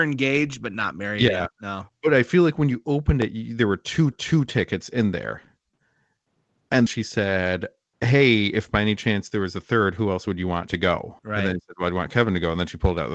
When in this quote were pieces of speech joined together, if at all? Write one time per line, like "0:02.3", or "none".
0:04.1
0:06.9
0:11.2